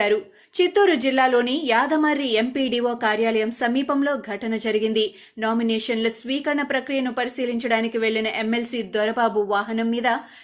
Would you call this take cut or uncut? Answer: uncut